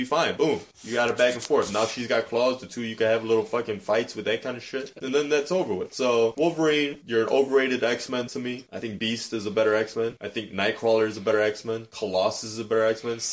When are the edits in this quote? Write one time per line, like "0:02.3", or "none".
none

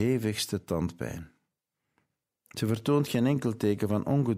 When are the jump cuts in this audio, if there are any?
none

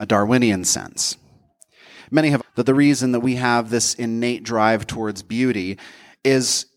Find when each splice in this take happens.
0:02.4

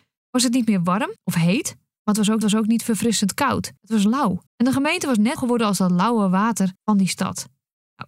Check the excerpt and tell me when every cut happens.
0:01.2
0:02.4
0:03.8
0:04.5
0:05.4
0:06.7

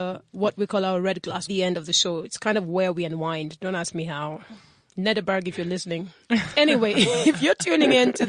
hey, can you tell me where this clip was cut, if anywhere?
0:01.5

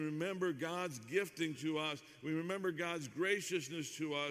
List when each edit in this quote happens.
none

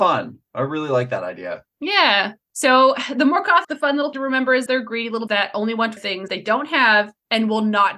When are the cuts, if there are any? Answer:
0:03.6
0:04.1
0:04.7
0:05.3
0:06.0
0:06.3

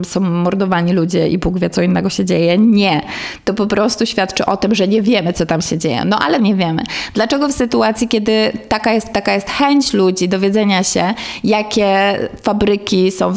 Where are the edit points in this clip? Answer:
0:06.4
0:09.1

